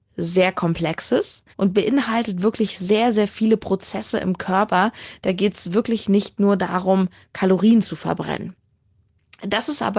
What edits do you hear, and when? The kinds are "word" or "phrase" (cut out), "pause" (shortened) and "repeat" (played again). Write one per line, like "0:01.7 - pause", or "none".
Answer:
0:01.5 - pause